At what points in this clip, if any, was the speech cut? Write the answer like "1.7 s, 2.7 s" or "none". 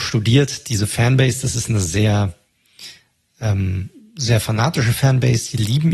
none